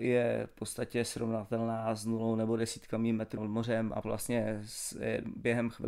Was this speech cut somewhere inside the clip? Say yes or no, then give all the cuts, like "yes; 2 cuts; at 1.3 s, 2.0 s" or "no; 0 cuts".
yes; 2 cuts; at 3.4 s, 4.0 s